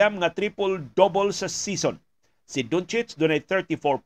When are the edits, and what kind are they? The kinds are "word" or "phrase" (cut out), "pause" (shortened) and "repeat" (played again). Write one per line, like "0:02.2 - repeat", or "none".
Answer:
none